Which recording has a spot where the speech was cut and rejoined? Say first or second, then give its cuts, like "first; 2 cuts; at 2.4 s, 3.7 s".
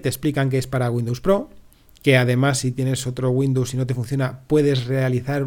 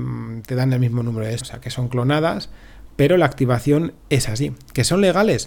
second; 2 cuts; at 1.4 s, 4.0 s